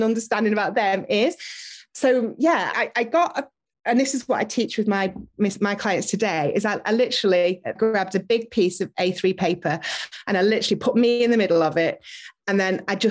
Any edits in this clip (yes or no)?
yes